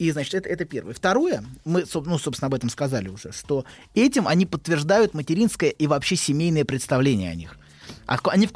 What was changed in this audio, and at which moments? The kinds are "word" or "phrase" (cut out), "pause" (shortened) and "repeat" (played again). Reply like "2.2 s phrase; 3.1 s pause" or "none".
none